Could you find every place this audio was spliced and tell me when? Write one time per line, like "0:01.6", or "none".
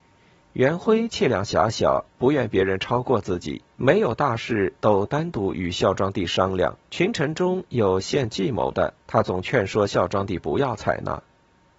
0:02.1
0:03.7
0:06.8
0:09.0